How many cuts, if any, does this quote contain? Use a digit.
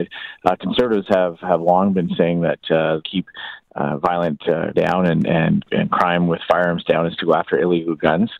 2